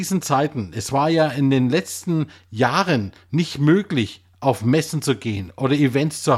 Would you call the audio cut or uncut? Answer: uncut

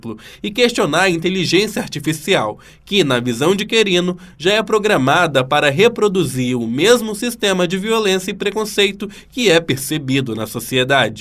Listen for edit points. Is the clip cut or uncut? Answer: uncut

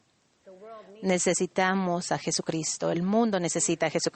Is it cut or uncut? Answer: uncut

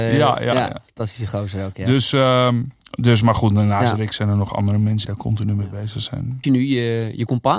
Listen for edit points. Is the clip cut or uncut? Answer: cut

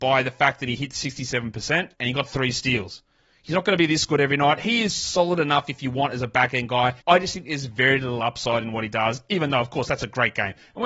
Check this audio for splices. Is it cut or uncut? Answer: cut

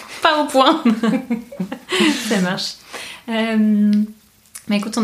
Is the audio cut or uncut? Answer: uncut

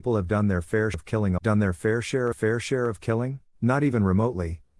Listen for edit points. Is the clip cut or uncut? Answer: cut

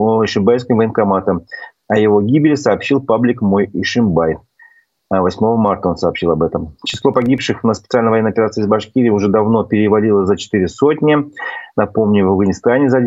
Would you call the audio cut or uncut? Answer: uncut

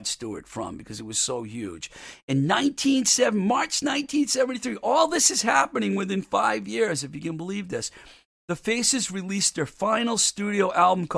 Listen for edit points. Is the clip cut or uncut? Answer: uncut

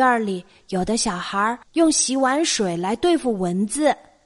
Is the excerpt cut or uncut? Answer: cut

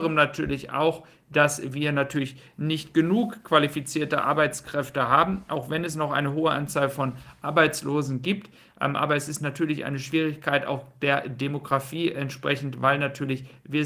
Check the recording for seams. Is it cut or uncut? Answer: uncut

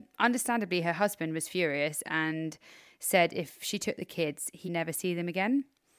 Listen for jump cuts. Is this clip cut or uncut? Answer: cut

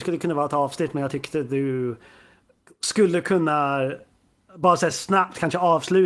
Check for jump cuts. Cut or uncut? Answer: uncut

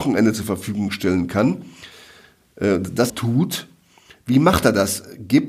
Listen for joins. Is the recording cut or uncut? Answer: cut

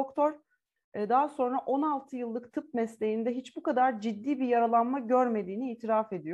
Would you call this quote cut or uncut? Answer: uncut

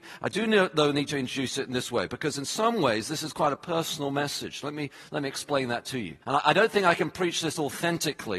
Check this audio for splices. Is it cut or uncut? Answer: cut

